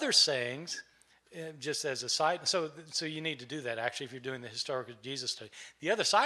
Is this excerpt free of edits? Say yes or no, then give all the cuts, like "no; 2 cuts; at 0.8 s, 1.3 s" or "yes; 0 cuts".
yes; 0 cuts